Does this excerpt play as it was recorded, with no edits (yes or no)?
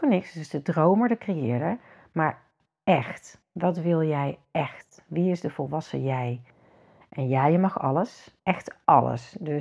yes